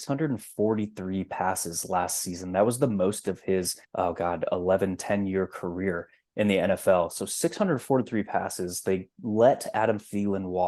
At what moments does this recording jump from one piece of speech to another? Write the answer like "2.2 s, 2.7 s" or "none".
3.8 s